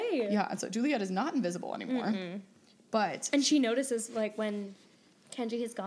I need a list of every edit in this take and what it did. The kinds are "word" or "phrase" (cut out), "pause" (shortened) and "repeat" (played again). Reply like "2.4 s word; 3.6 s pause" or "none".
none